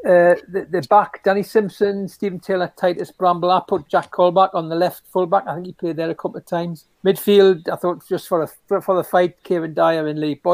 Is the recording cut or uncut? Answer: cut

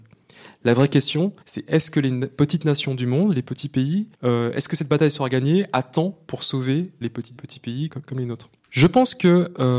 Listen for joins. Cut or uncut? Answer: cut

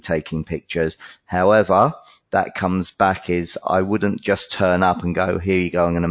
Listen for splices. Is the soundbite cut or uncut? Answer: uncut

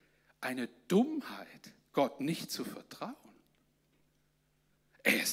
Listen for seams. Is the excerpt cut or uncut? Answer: uncut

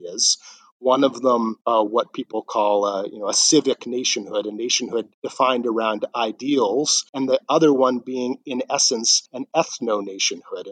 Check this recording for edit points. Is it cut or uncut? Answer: cut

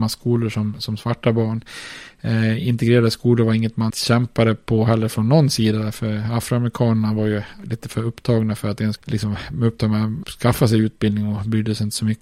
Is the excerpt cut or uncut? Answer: cut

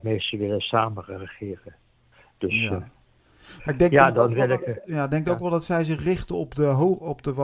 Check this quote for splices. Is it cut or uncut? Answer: uncut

